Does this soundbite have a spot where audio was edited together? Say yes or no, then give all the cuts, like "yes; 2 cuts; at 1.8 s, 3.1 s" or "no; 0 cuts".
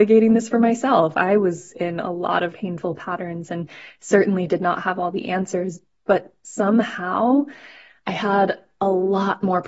yes; 1 cut; at 2.5 s